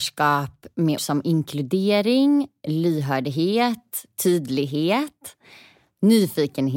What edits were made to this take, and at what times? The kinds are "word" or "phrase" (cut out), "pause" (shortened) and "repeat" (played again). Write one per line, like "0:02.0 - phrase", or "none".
0:01.0 - word